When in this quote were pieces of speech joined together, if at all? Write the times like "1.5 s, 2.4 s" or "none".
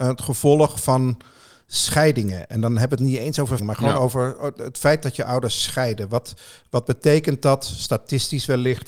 3.6 s